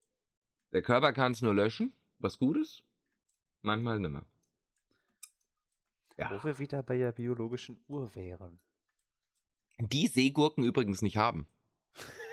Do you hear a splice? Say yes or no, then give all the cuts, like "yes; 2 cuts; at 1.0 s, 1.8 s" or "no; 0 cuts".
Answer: no; 0 cuts